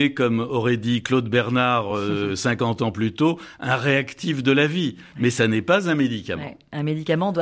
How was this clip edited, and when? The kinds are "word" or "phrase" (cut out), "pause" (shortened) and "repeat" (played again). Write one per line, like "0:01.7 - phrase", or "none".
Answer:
none